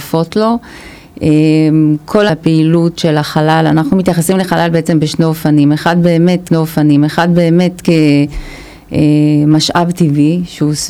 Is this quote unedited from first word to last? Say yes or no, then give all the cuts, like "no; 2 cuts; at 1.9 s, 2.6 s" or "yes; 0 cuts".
no; 2 cuts; at 2.3 s, 6.5 s